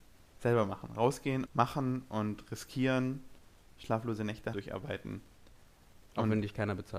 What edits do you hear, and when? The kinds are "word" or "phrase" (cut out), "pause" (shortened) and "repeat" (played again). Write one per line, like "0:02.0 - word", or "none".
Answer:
0:01.5 - word
0:04.5 - word